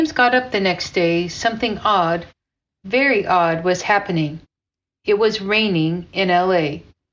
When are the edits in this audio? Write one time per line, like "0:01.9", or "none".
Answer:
none